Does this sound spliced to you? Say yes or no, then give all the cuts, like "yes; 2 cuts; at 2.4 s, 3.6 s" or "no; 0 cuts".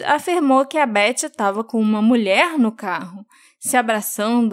no; 0 cuts